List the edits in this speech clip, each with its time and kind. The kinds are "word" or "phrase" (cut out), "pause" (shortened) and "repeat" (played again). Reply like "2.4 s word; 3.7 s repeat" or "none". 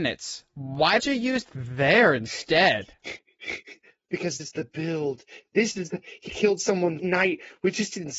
1.0 s word; 1.5 s word; 4.4 s word; 6.3 s word; 7.0 s word